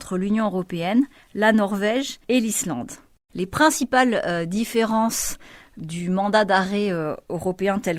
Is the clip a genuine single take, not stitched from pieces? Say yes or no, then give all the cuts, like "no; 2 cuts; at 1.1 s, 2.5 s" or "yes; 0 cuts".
yes; 0 cuts